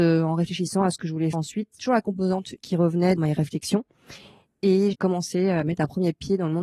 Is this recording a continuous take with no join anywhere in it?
no; 5 cuts; at 1.3 s, 1.8 s, 2.6 s, 3.2 s, 4.9 s

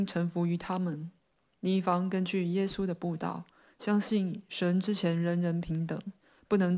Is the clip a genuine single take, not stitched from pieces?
yes; 0 cuts

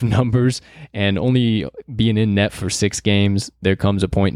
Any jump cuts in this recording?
no; 0 cuts

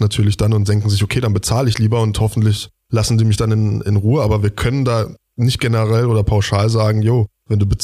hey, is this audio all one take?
yes; 0 cuts

